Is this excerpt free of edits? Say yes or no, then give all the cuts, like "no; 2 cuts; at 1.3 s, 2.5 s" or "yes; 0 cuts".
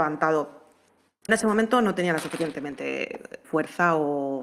no; 2 cuts; at 1.3 s, 3.4 s